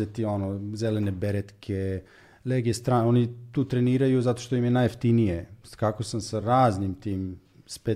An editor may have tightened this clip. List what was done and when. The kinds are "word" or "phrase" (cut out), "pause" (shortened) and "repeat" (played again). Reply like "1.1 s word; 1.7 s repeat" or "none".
none